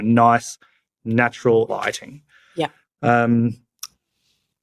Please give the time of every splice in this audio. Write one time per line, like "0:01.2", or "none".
0:01.7

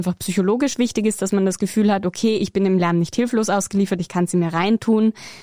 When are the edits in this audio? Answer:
none

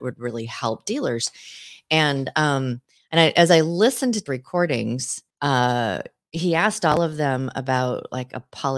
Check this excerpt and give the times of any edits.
0:04.3
0:05.3

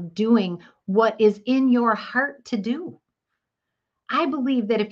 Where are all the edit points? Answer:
none

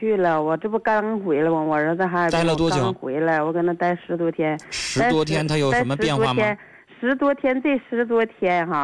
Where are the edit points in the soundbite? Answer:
none

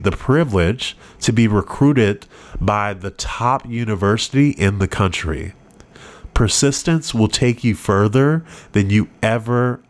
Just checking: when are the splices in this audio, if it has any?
none

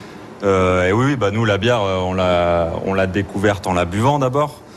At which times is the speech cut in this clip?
none

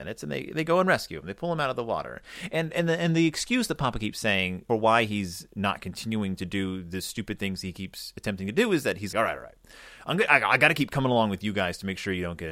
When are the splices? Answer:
0:04.7
0:09.1

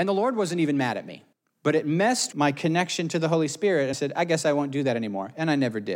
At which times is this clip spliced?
0:01.3
0:02.3
0:03.9

